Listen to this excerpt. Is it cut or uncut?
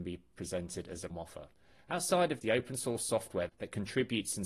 cut